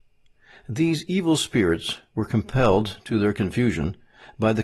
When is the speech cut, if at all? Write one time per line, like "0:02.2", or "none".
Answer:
none